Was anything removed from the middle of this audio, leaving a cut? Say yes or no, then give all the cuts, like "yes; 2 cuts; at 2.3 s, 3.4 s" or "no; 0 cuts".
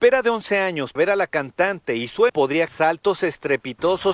yes; 3 cuts; at 1.0 s, 2.3 s, 2.7 s